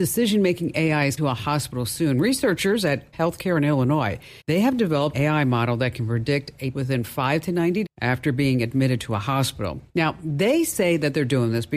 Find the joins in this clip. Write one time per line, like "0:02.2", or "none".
0:01.2
0:03.1
0:04.4
0:05.1
0:06.7
0:07.8
0:09.9